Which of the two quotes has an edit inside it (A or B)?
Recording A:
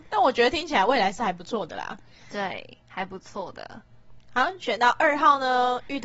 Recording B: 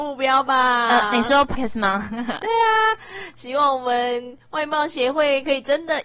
B